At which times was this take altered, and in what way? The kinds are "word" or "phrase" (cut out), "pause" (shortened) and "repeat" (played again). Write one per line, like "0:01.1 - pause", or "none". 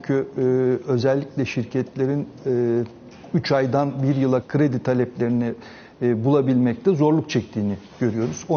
0:04.4 - word